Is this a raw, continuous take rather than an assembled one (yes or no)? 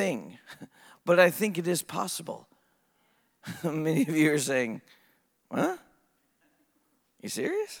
yes